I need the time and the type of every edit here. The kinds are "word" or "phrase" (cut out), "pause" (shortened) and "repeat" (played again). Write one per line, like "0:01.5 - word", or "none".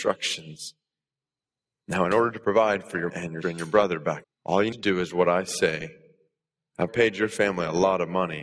0:03.1 - word
0:03.4 - word
0:04.2 - word
0:04.7 - word
0:06.9 - word